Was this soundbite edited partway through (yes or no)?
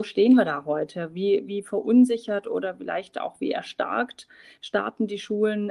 no